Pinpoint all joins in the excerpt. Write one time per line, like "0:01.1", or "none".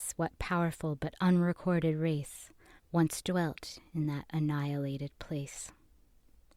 0:02.8